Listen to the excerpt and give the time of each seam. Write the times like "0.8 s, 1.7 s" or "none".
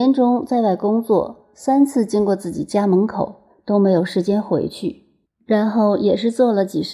none